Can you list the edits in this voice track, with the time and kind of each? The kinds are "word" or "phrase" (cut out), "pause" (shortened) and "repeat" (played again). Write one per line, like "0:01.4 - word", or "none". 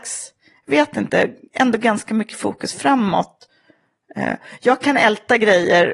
none